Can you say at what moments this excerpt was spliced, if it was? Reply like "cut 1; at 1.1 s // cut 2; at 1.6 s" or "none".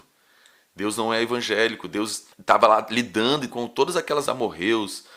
cut 1; at 1.0 s // cut 2; at 2.3 s // cut 3; at 3.5 s // cut 4; at 4.3 s